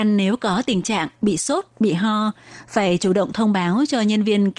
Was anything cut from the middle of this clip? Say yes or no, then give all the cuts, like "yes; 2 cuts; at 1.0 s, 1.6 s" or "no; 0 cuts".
no; 0 cuts